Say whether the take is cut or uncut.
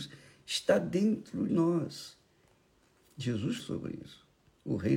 cut